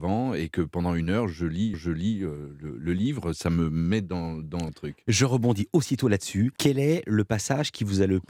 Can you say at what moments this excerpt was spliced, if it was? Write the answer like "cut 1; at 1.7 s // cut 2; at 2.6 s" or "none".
cut 1; at 1.7 s // cut 2; at 4.7 s // cut 3; at 6.6 s